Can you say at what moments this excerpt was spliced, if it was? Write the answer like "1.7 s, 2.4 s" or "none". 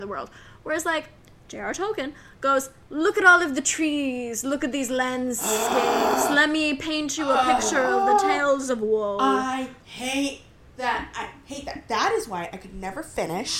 none